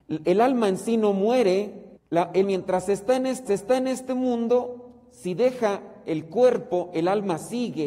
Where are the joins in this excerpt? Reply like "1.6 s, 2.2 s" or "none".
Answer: 2.0 s, 2.4 s, 3.5 s